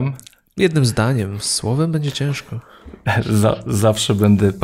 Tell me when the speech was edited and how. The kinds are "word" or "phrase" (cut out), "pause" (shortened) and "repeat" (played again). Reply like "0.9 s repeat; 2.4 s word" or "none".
none